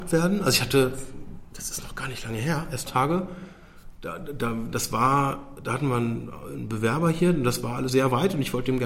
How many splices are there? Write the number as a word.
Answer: two